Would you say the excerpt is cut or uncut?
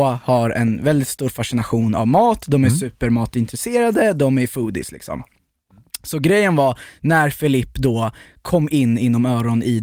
uncut